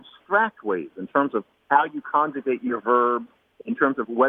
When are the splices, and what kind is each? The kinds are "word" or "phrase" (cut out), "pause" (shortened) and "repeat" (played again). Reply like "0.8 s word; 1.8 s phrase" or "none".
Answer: none